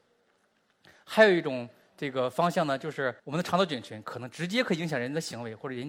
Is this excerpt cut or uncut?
cut